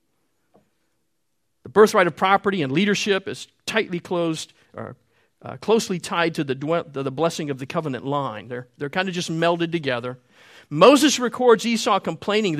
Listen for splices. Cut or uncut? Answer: uncut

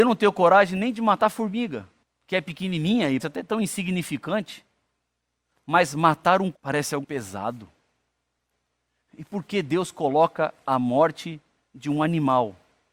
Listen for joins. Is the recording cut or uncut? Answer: cut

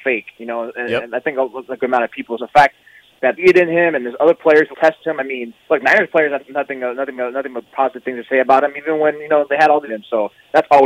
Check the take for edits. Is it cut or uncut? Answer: cut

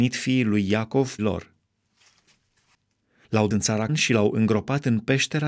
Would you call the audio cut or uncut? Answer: cut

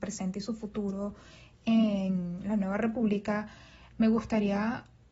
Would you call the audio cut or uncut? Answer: uncut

